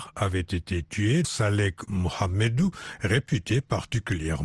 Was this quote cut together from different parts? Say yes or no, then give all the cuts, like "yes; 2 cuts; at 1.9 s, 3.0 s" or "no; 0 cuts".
yes; 2 cuts; at 1.2 s, 1.9 s